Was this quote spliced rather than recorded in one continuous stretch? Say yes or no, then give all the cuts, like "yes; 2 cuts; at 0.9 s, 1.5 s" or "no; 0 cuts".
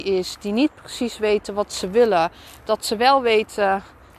no; 0 cuts